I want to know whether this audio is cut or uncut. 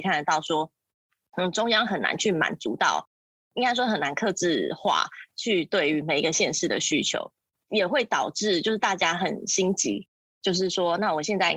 uncut